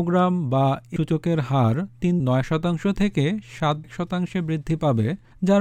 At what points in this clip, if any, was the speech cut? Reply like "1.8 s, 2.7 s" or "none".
1.0 s, 2.2 s, 3.8 s